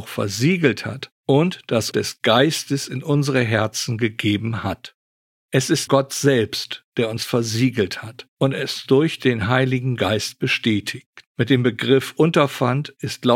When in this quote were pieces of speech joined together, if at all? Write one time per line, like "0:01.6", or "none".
0:01.1
0:01.9
0:05.9
0:08.3
0:11.3